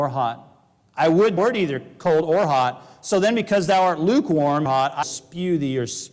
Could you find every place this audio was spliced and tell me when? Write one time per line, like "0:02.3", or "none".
0:01.4
0:04.7
0:05.0